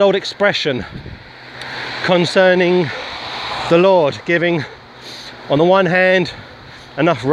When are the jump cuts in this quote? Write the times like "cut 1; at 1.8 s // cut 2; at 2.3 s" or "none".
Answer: none